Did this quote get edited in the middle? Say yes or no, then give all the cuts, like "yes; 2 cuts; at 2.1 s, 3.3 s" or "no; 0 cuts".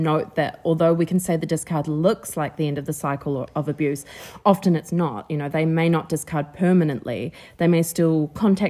no; 0 cuts